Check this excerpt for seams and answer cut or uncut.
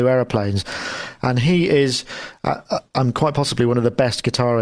uncut